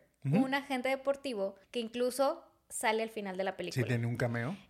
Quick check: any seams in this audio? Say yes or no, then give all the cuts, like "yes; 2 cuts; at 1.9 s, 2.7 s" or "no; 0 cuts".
yes; 1 cut; at 1.6 s